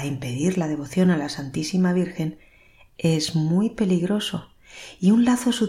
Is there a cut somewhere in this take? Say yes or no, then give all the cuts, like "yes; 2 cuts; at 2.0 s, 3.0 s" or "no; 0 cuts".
no; 0 cuts